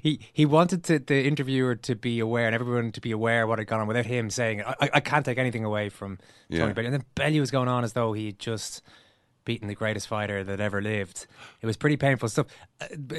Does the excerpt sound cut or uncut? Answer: uncut